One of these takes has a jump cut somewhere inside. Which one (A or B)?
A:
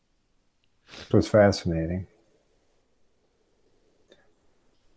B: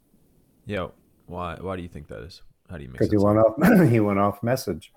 A